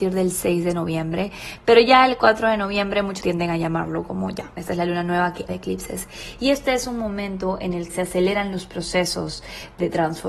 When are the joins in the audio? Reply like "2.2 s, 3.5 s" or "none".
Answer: 3.2 s, 5.5 s, 7.9 s